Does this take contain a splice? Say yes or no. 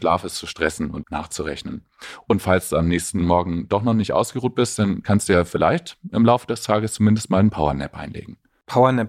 yes